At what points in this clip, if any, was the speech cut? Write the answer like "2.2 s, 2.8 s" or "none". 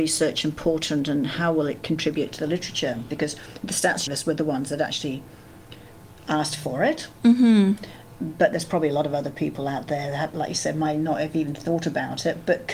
4.1 s